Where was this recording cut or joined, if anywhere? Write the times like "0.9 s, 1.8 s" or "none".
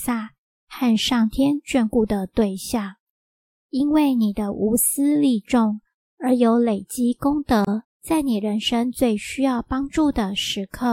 7.8 s

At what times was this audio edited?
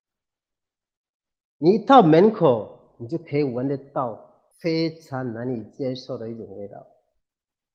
4.5 s

